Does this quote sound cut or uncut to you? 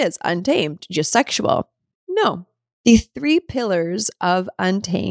cut